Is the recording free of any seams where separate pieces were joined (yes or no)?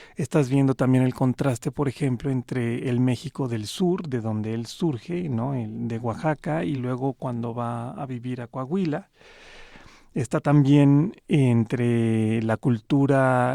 yes